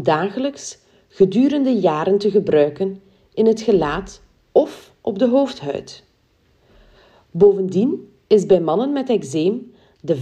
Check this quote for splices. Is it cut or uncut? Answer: uncut